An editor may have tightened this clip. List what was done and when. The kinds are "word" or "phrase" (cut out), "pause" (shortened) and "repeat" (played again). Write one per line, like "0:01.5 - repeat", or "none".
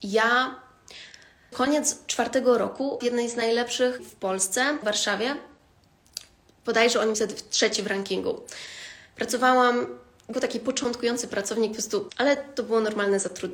0:01.5 - word
0:03.0 - word
0:04.0 - word
0:04.8 - word
0:07.1 - word
0:10.3 - word
0:12.1 - word